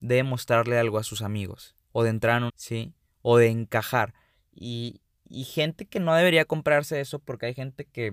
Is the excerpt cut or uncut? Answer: cut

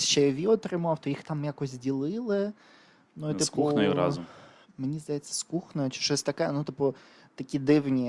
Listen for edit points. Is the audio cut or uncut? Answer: uncut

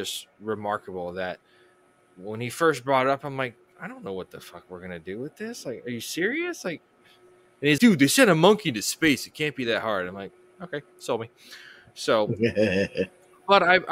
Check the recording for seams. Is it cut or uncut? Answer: cut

